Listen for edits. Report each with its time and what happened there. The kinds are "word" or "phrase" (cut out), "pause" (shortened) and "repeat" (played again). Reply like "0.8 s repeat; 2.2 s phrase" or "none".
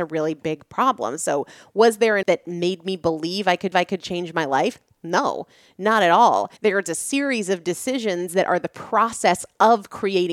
2.2 s word; 3.7 s repeat; 6.6 s pause